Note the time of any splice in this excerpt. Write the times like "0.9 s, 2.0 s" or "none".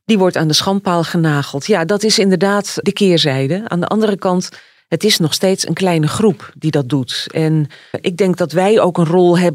2.8 s, 7.9 s